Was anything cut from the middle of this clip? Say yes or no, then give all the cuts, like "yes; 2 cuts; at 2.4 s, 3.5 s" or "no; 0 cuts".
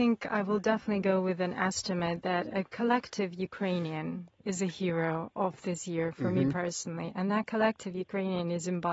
no; 0 cuts